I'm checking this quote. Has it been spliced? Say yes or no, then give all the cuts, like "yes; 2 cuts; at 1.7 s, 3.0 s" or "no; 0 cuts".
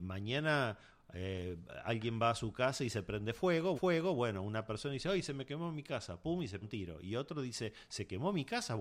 yes; 2 cuts; at 3.7 s, 6.6 s